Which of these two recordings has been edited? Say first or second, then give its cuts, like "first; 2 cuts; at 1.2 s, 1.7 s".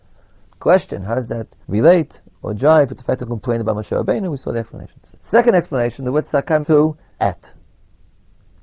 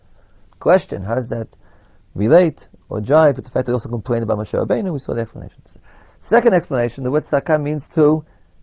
first; 5 cuts; at 1.6 s, 3.2 s, 5.2 s, 6.6 s, 7.2 s